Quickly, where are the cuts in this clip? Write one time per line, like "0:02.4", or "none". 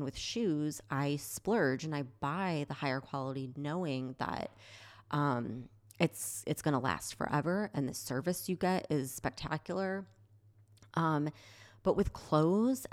none